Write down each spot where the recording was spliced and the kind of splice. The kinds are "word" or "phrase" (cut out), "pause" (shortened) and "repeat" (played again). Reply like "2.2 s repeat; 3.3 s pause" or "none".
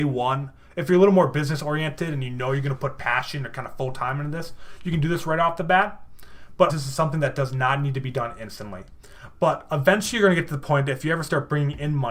6.7 s word